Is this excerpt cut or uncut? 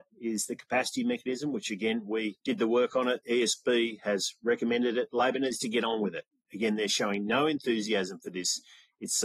cut